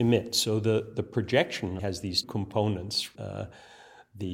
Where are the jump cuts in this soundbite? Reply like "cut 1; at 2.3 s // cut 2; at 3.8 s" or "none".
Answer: cut 1; at 1.8 s // cut 2; at 2.2 s // cut 3; at 3.1 s